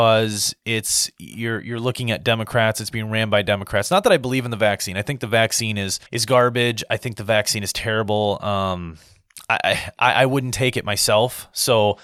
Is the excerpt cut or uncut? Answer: cut